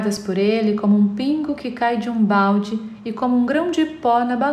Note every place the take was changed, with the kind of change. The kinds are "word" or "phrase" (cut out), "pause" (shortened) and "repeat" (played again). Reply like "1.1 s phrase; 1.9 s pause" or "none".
none